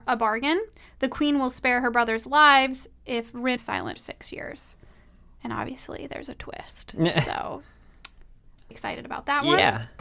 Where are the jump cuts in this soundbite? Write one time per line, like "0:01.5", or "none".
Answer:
0:03.6
0:04.0
0:08.7